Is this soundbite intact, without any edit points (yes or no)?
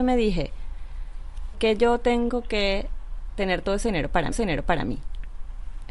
no